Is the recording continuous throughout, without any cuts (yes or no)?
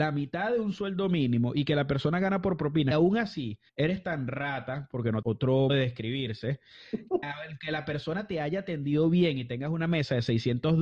no